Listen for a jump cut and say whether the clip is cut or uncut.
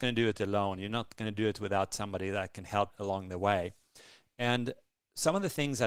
cut